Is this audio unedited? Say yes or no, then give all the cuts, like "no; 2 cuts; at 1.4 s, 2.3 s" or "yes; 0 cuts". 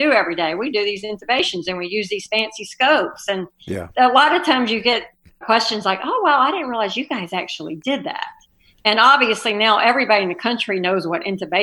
yes; 0 cuts